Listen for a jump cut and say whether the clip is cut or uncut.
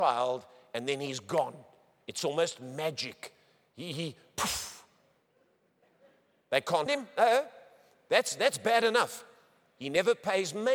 cut